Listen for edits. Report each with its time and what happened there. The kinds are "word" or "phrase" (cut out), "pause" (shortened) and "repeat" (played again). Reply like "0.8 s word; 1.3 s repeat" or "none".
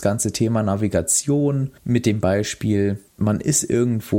1.8 s pause; 3.1 s pause